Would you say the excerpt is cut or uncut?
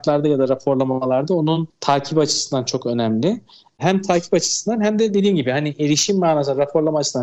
uncut